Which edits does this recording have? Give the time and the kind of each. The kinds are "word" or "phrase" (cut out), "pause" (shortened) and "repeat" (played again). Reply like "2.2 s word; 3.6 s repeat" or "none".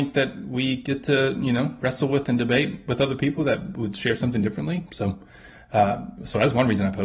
none

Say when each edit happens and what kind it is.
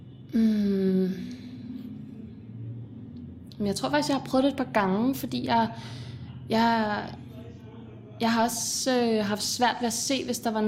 none

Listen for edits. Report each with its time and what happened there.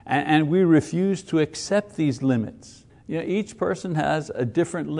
2.9 s pause

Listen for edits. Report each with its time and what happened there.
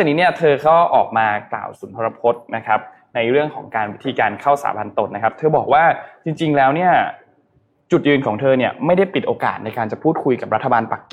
none

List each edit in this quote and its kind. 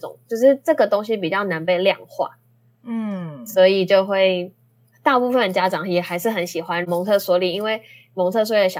none

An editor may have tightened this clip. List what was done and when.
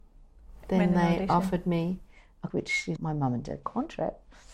2.5 s word; 3.0 s word; 3.6 s word

